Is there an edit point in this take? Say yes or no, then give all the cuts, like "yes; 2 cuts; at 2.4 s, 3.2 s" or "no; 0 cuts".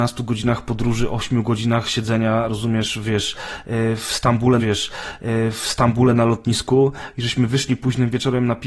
yes; 1 cut; at 4.6 s